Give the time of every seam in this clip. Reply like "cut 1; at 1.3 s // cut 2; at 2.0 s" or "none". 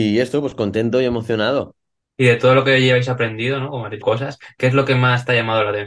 cut 1; at 2.1 s // cut 2; at 4.0 s